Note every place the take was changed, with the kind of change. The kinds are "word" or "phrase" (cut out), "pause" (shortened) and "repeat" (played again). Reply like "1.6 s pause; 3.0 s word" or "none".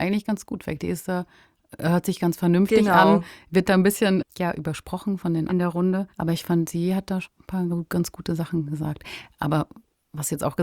3.6 s word; 4.3 s pause; 5.5 s phrase; 6.1 s pause; 7.2 s word